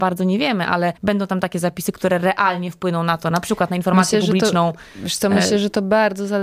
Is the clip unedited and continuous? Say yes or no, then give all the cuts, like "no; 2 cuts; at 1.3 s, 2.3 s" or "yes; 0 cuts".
no; 1 cut; at 1.0 s